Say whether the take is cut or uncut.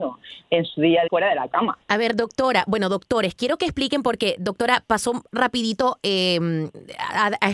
cut